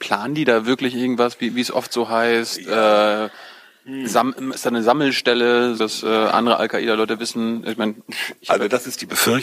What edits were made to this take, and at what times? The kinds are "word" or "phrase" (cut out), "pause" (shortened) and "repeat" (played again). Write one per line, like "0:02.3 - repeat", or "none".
0:05.8 - word